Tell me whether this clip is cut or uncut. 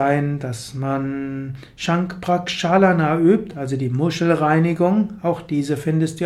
uncut